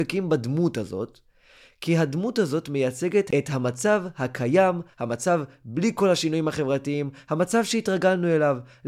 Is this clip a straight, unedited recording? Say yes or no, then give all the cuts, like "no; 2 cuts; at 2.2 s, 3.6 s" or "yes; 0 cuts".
no; 1 cut; at 4.9 s